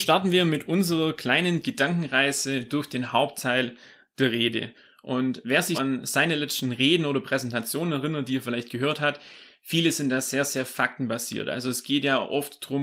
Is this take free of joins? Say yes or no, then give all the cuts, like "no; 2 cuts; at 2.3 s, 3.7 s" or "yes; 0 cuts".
no; 1 cut; at 5.7 s